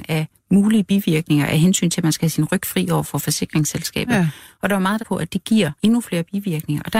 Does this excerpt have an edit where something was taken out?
yes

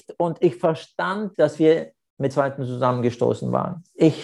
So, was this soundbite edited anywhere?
yes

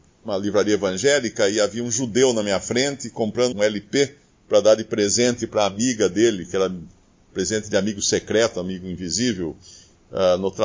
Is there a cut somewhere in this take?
yes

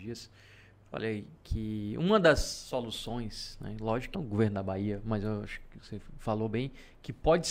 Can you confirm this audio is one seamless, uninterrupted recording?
no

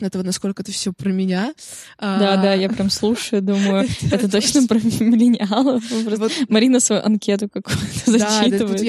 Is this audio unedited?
yes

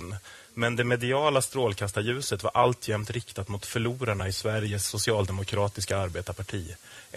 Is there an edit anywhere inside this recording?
no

